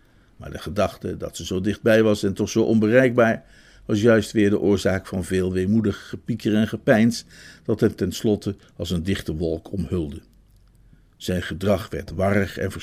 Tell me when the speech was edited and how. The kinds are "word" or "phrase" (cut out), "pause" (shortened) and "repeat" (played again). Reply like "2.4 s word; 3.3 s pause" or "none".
none